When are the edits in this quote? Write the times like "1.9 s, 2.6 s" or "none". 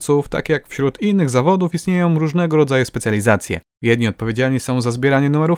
none

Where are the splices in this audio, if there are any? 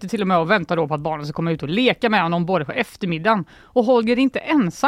2.7 s

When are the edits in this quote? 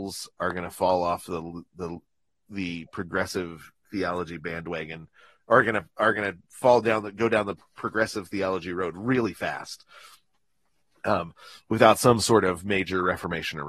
none

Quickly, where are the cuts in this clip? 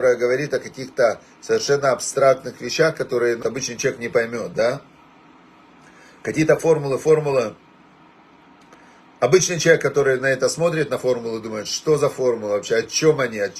3.4 s, 6.6 s

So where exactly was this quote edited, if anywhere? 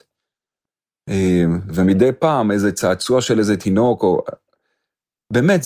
none

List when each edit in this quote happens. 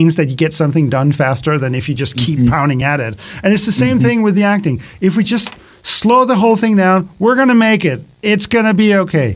none

